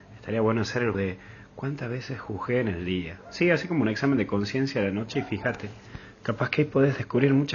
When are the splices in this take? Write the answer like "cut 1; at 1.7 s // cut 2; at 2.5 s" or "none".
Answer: cut 1; at 0.9 s